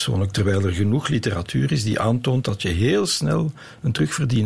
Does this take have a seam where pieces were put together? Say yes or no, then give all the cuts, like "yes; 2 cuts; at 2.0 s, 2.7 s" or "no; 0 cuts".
no; 0 cuts